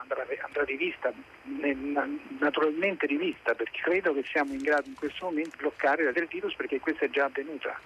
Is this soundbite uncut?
no; 3 cuts; at 3.8 s, 5.5 s, 6.1 s

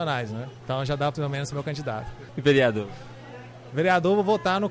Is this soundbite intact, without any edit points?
no; 2 cuts; at 1.1 s, 1.5 s

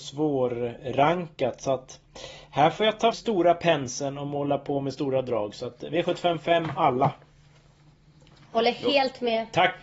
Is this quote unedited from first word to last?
no; 1 cut; at 3.1 s

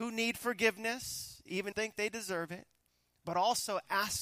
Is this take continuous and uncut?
no; 2 cuts; at 1.7 s, 2.9 s

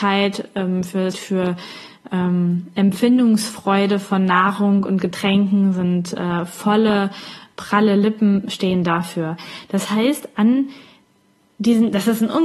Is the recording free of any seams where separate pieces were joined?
no; 1 cut; at 1.1 s

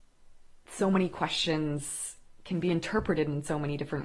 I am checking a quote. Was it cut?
no; 0 cuts

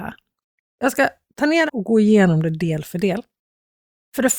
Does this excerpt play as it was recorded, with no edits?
no; 1 cut; at 1.7 s

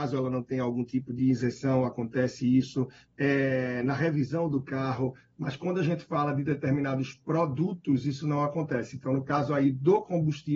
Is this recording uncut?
yes; 0 cuts

